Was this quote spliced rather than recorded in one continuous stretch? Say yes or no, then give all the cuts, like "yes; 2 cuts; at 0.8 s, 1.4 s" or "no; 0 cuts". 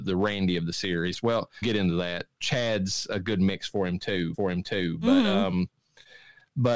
yes; 2 cuts; at 1.6 s, 4.3 s